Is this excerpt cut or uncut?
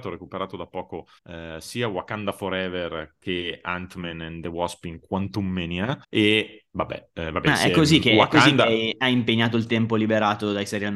cut